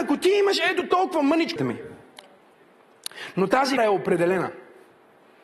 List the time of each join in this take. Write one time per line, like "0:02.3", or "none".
0:01.6
0:03.8